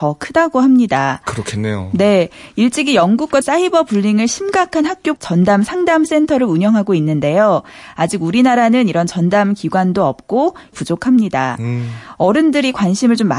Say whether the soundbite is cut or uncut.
cut